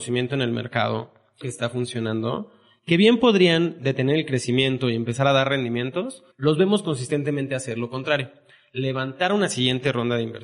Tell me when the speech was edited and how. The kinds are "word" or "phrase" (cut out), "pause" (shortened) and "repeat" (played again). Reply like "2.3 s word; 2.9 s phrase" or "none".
1.4 s phrase; 6.3 s pause